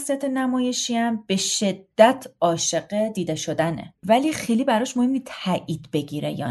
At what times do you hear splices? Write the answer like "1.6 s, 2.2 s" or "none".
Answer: 4.0 s